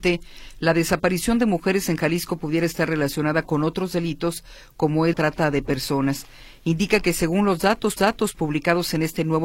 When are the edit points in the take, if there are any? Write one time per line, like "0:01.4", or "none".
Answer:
0:05.1
0:08.0